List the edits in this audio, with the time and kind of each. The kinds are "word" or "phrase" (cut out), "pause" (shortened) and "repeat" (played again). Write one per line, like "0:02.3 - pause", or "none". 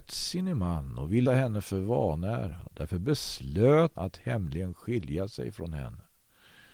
0:01.2 - phrase
0:03.9 - word